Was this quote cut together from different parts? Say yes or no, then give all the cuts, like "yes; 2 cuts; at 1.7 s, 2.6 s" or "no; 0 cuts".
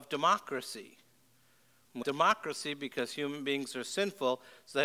yes; 1 cut; at 2.0 s